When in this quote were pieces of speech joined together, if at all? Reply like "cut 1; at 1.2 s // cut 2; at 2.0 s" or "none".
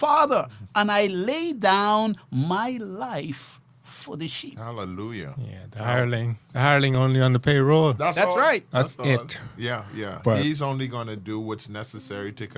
cut 1; at 6.4 s